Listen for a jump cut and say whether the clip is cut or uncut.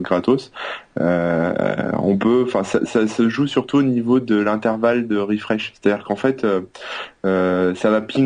uncut